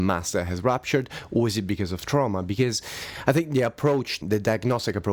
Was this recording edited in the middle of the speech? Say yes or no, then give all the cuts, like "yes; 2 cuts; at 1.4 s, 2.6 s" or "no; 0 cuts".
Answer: yes; 1 cut; at 4.2 s